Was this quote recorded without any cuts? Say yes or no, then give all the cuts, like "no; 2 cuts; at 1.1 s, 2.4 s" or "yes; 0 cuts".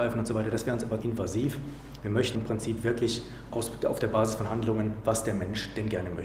no; 3 cuts; at 1.0 s, 2.3 s, 3.5 s